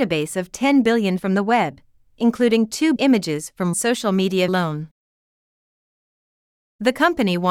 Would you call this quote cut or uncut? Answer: cut